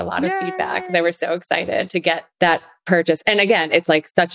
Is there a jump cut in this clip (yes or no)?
yes